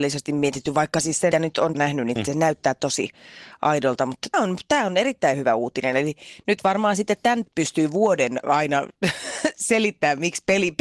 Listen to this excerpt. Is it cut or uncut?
cut